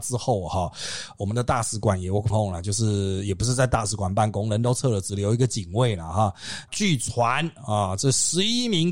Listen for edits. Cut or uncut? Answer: cut